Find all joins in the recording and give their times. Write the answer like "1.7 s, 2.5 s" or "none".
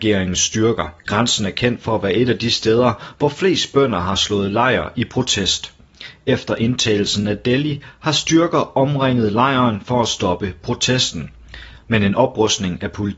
1.0 s

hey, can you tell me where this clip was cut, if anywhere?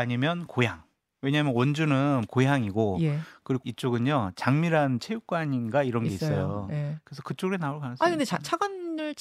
2.3 s, 3.6 s

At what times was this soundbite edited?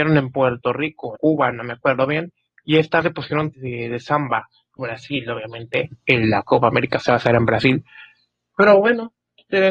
1.2 s, 3.0 s, 3.5 s, 4.8 s

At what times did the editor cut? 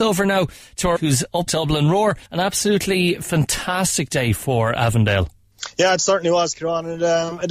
1.0 s, 1.5 s, 2.3 s

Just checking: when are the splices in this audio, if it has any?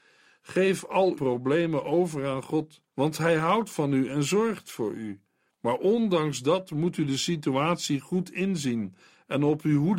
1.2 s, 2.9 s, 5.5 s

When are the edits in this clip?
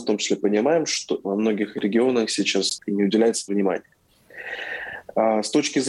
1.2 s, 2.8 s, 3.5 s

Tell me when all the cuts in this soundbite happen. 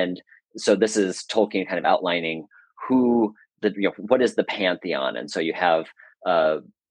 none

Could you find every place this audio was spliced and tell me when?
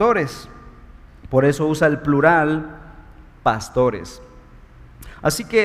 none

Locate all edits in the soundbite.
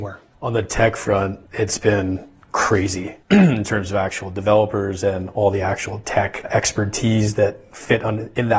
1.5 s, 3.2 s

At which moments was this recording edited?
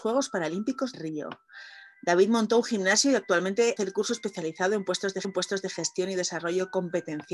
0.9 s, 3.8 s, 5.2 s

